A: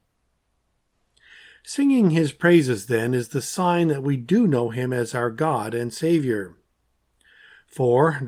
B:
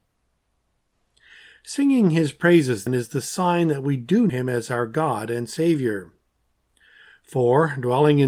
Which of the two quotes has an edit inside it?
B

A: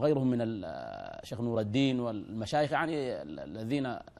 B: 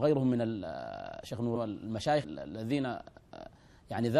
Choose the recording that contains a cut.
B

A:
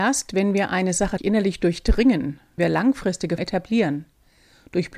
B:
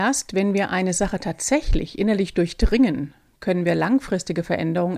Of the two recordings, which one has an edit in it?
A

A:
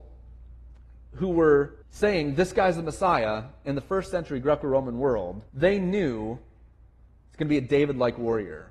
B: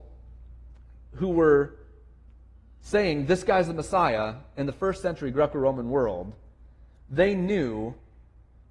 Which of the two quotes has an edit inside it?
A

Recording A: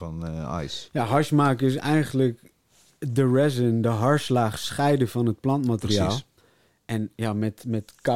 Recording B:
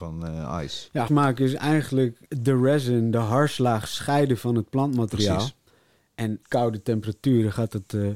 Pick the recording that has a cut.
B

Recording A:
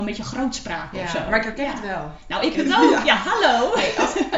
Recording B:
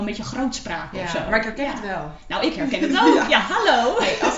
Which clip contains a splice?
A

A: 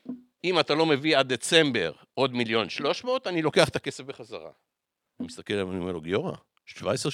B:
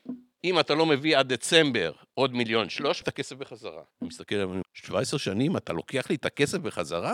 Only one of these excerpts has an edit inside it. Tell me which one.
B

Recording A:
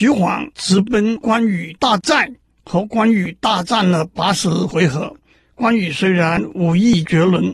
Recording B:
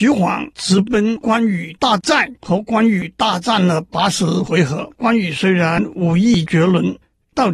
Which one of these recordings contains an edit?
B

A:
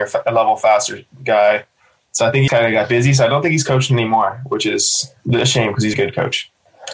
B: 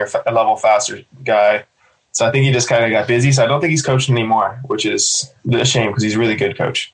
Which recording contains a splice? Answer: A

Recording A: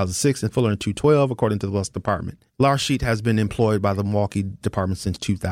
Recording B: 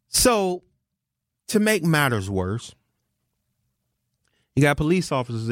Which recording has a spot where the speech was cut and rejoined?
A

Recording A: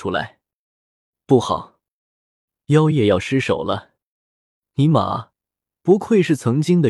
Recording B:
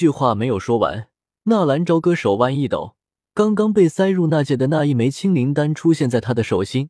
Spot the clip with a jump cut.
B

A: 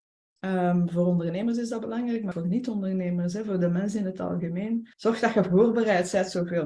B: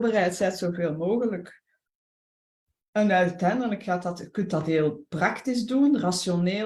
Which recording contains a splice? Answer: A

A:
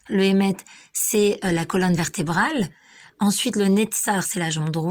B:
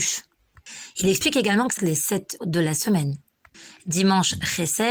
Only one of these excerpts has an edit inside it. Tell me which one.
B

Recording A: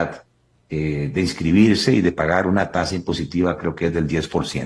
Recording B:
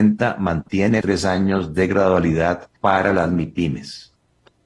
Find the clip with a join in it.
B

